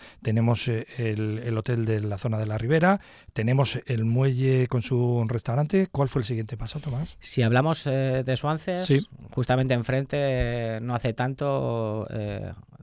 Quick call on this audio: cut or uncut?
uncut